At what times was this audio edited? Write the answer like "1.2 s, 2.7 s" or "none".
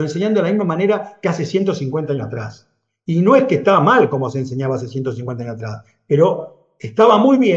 none